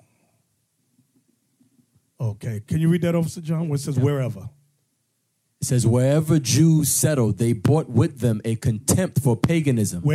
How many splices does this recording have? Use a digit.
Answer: 0